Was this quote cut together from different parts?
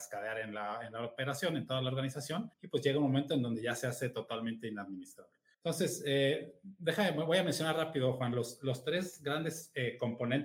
yes; 2 cuts; at 2.5 s, 5.5 s

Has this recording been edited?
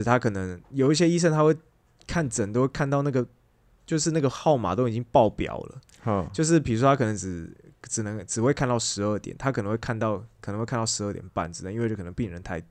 no; 0 cuts

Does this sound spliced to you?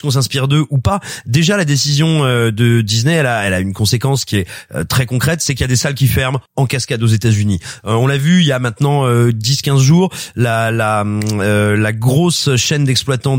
yes; 1 cut; at 6.5 s

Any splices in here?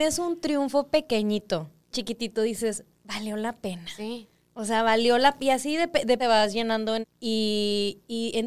yes; 3 cuts; at 1.9 s, 6.2 s, 7.0 s

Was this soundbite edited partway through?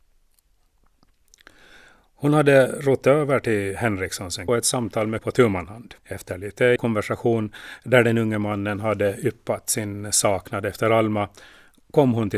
yes; 4 cuts; at 4.5 s, 5.2 s, 6.0 s, 6.8 s

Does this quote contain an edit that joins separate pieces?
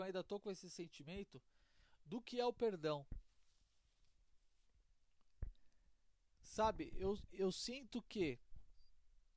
no; 0 cuts

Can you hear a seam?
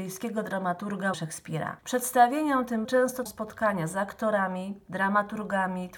yes; 4 cuts; at 1.1 s, 1.8 s, 2.8 s, 3.3 s

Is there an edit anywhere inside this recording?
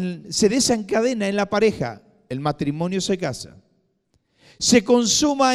no; 0 cuts

